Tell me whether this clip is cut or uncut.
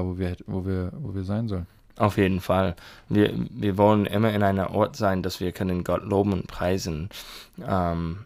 uncut